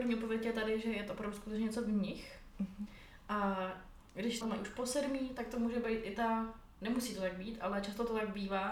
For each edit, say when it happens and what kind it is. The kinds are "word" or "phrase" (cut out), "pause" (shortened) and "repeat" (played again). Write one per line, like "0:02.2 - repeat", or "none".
0:04.4 - word

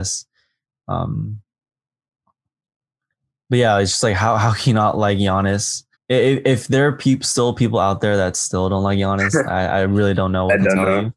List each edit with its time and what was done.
0:05.9 - pause

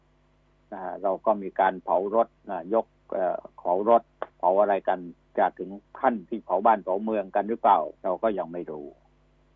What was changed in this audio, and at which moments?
0:02.4 - pause
0:04.3 - pause
0:08.0 - pause

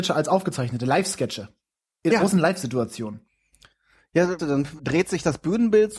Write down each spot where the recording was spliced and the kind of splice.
0:02.1 - word
0:04.4 - word
0:04.8 - word

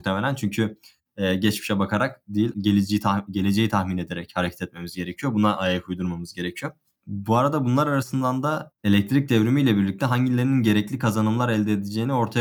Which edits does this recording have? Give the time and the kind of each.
0:02.5 - word

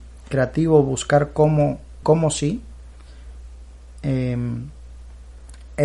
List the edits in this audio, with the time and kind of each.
0:02.0 - word

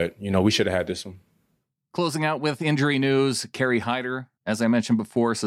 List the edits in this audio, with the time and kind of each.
0:04.4 - pause

